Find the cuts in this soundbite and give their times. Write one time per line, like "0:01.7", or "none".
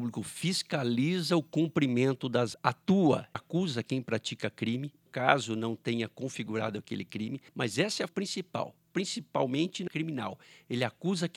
0:02.5
0:03.3
0:05.1
0:07.5
0:08.1
0:09.9